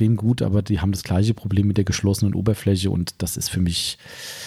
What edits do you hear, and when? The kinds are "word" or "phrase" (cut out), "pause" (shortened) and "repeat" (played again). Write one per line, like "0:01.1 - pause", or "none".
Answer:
none